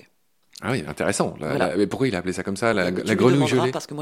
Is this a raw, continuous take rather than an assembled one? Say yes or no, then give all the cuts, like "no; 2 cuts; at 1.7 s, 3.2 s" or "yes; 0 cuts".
yes; 0 cuts